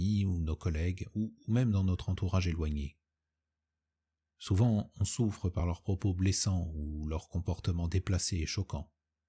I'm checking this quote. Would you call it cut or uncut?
uncut